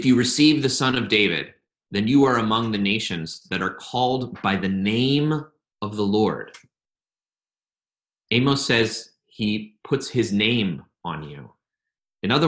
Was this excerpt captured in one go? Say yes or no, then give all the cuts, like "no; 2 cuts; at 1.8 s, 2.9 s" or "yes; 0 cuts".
yes; 0 cuts